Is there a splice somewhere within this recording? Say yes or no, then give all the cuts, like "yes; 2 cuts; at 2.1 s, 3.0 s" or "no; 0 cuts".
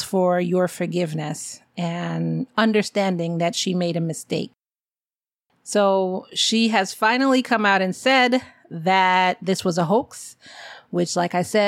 no; 0 cuts